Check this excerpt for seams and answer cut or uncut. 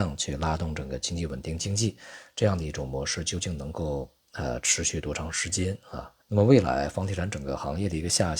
cut